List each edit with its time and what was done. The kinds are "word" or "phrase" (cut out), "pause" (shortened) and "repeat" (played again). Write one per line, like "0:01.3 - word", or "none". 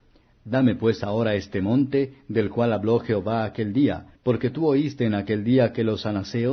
0:04.2 - pause